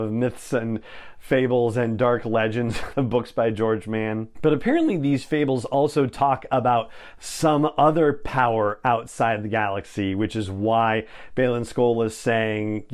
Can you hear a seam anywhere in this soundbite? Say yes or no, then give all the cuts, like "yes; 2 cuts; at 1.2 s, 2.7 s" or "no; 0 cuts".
yes; 1 cut; at 2.9 s